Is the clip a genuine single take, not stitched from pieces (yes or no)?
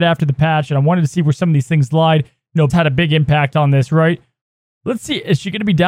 no